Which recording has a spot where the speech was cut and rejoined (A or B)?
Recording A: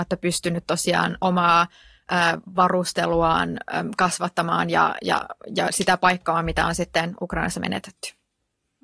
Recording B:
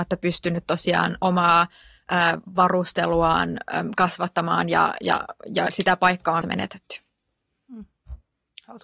B